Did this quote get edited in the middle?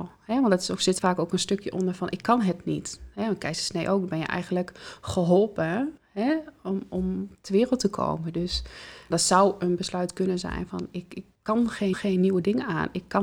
yes; 5 cuts; at 1.0 s, 6.0 s, 9.1 s, 11.3 s, 11.9 s

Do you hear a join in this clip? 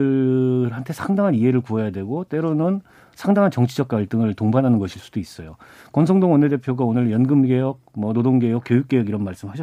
no; 0 cuts

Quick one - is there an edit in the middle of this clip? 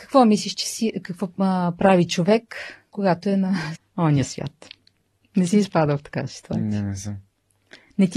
yes; 1 cut; at 3.8 s

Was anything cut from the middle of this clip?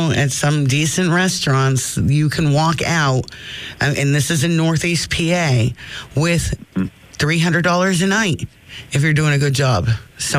no; 0 cuts

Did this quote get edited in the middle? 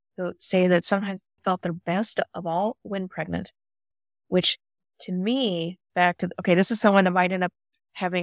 yes; 2 cuts; at 1.4 s, 5.9 s

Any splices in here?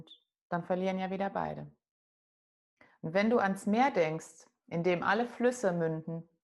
no; 0 cuts

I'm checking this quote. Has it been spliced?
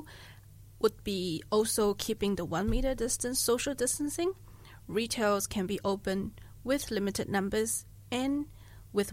no; 0 cuts

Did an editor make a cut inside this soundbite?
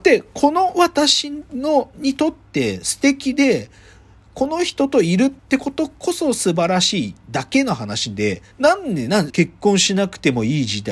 yes; 3 cuts; at 5.4 s, 8.5 s, 9.3 s

